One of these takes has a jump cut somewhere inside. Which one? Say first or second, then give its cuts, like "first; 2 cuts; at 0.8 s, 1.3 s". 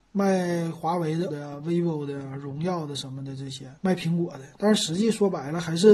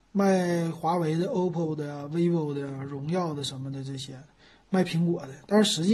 first; 2 cuts; at 1.3 s, 3.8 s